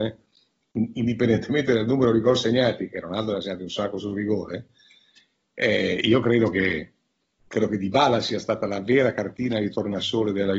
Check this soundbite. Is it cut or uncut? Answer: uncut